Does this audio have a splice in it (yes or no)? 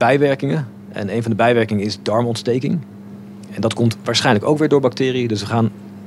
no